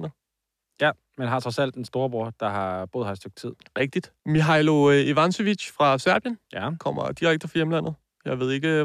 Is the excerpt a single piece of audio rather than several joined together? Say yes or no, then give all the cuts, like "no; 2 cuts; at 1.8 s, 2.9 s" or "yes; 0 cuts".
no; 2 cuts; at 4.2 s, 6.4 s